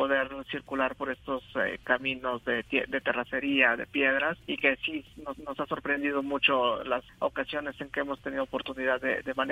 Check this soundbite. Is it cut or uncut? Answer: cut